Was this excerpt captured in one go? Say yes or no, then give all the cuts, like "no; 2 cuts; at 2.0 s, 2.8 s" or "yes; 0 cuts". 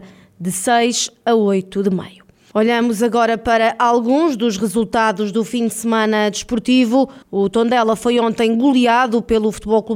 no; 1 cut; at 7.2 s